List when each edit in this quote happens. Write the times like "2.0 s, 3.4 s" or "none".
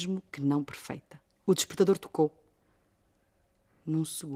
1.3 s